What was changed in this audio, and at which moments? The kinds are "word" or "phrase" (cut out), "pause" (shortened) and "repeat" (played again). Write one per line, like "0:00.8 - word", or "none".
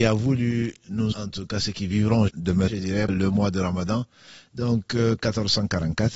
0:01.1 - word
0:02.3 - word
0:02.7 - word
0:03.1 - word